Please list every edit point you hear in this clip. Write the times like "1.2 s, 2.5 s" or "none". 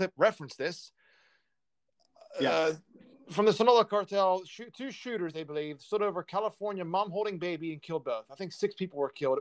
none